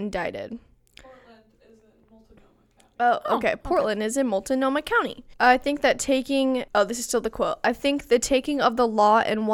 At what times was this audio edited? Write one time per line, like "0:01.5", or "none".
0:05.3
0:06.7